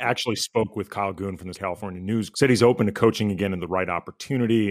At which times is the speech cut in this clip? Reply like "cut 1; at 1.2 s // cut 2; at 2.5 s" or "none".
cut 1; at 1.5 s // cut 2; at 2.3 s